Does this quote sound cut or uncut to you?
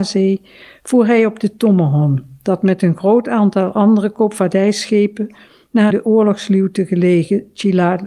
cut